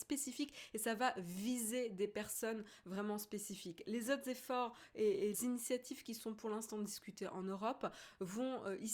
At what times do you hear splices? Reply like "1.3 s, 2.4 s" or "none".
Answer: 5.3 s